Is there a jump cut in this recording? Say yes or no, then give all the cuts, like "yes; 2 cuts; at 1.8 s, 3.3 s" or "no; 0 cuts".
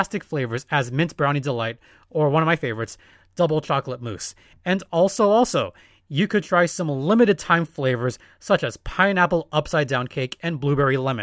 no; 0 cuts